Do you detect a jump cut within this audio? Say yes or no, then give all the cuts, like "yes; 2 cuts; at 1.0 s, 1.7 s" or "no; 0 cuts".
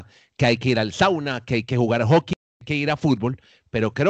no; 0 cuts